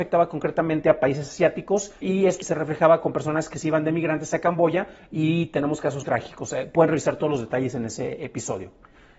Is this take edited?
yes; 3 cuts; at 2.0 s, 2.4 s, 6.0 s

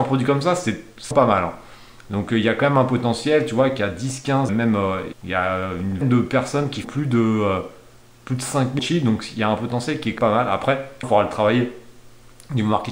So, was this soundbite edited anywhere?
yes; 8 cuts; at 1.1 s, 4.5 s, 5.1 s, 6.0 s, 6.8 s, 8.8 s, 10.2 s, 11.0 s

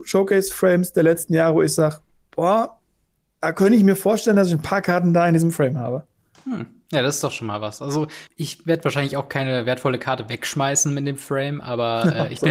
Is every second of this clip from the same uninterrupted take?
no; 1 cut; at 8.3 s

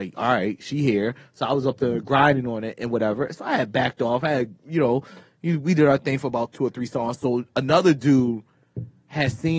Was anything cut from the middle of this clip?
no; 0 cuts

